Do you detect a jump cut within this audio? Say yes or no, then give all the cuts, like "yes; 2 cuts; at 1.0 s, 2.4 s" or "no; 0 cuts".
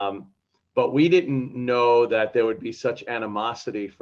no; 0 cuts